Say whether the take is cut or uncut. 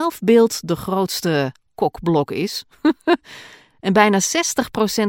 uncut